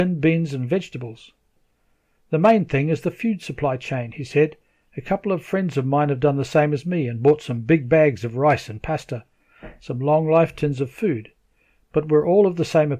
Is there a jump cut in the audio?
no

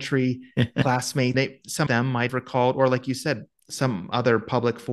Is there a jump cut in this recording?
yes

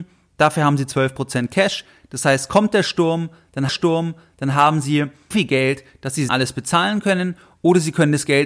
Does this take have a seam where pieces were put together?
yes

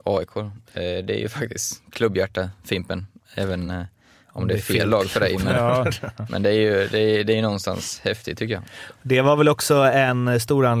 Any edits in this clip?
no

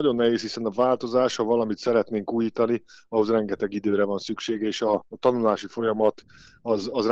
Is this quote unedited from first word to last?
yes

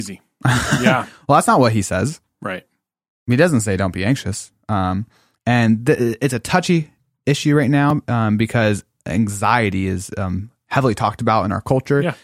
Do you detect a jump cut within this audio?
no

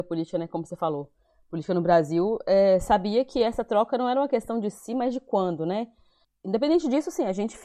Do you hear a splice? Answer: no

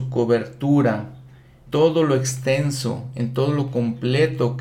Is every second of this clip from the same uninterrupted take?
no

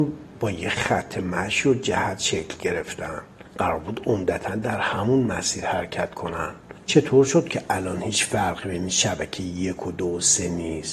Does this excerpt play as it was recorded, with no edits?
yes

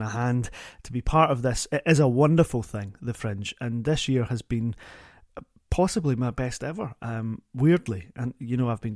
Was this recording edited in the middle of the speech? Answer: no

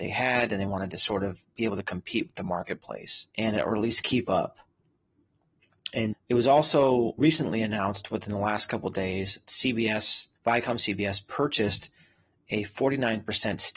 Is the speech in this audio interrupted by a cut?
yes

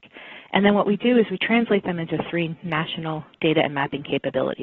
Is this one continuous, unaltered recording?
no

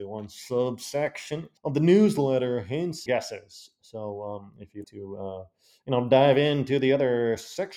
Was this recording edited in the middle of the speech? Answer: yes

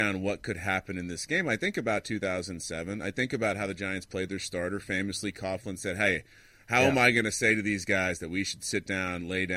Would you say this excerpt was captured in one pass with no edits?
yes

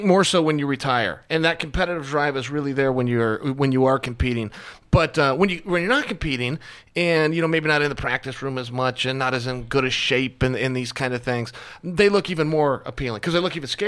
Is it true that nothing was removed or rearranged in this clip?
yes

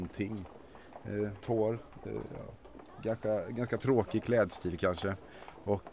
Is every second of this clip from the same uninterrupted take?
no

